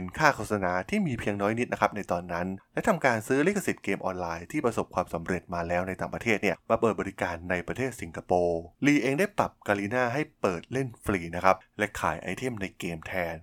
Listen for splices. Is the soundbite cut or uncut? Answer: cut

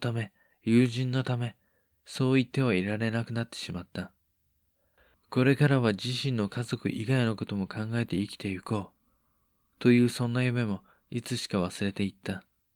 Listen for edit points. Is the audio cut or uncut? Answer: uncut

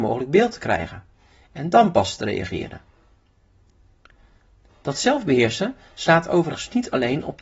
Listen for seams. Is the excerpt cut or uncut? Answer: uncut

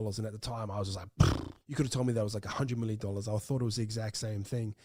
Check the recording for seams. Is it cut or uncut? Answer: cut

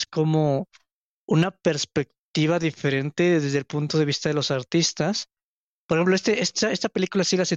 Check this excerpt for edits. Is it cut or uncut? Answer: uncut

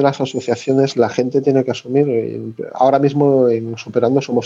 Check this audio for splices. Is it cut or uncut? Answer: uncut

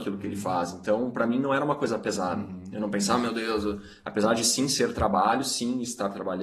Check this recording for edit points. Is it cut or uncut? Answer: uncut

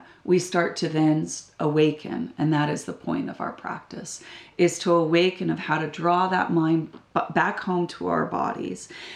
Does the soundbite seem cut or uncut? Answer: uncut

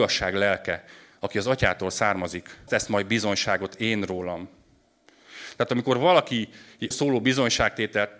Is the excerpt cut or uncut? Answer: cut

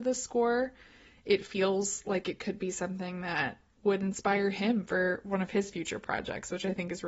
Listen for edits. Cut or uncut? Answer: uncut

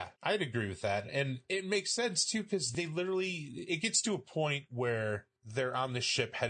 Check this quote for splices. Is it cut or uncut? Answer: cut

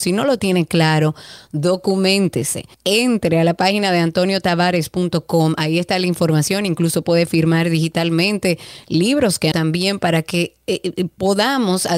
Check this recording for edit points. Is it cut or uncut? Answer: cut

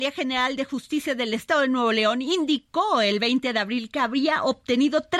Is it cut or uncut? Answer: uncut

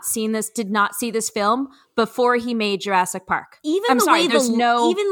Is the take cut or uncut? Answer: uncut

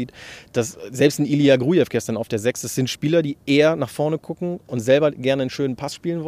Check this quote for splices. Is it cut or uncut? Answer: uncut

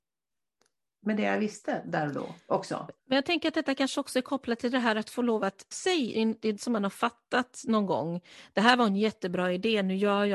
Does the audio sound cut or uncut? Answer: cut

